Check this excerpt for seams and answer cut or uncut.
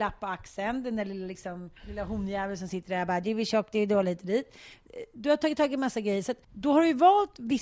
cut